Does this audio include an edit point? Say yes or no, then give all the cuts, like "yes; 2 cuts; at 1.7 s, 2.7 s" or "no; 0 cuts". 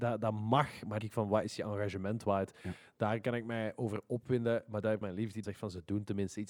yes; 3 cuts; at 1.0 s, 5.0 s, 5.4 s